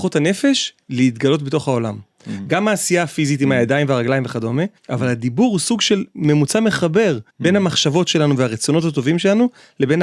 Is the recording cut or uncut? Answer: cut